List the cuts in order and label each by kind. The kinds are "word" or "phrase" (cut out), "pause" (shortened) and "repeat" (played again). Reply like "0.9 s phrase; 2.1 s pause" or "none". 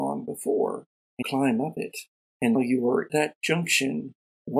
1.2 s word; 2.6 s word; 3.1 s word